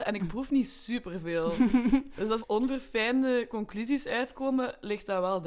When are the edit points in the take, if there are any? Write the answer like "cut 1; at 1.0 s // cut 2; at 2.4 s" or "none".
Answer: cut 1; at 2.4 s